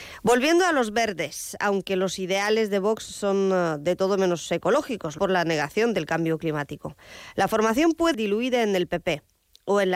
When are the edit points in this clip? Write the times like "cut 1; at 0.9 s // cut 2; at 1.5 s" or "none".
cut 1; at 5.2 s // cut 2; at 8.1 s